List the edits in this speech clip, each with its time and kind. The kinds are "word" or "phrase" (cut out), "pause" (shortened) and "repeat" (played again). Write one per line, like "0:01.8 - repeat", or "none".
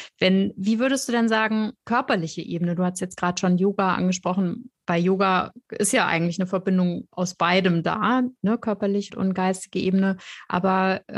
0:01.8 - pause
0:09.1 - word